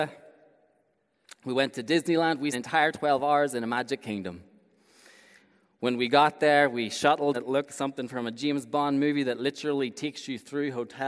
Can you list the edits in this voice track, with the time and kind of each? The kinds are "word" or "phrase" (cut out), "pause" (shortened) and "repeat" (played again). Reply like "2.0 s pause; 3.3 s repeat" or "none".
2.5 s phrase; 7.3 s phrase; 7.7 s word

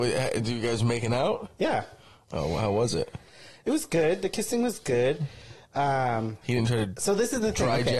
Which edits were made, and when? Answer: none

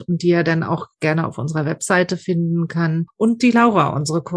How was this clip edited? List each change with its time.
none

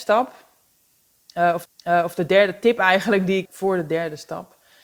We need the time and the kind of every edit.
1.6 s repeat; 3.4 s word

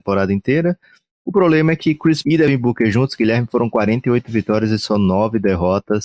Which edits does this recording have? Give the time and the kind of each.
2.2 s word

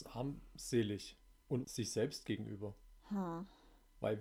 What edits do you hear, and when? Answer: 1.6 s word

